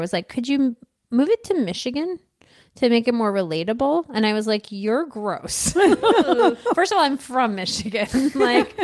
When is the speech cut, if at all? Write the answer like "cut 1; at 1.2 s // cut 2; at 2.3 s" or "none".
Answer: none

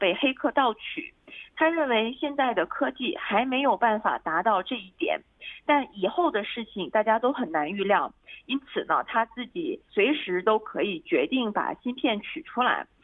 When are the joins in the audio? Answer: cut 1; at 9.9 s

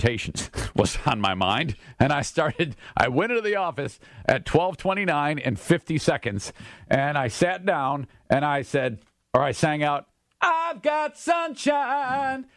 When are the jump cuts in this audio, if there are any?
none

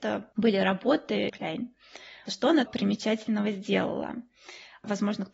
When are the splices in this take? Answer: cut 1; at 1.3 s // cut 2; at 2.7 s

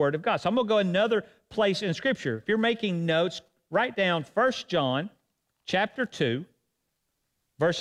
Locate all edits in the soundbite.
none

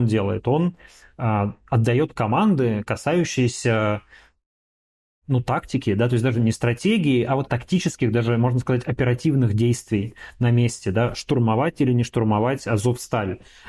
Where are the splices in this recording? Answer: cut 1; at 7.5 s

